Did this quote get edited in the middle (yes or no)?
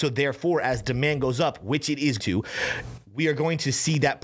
yes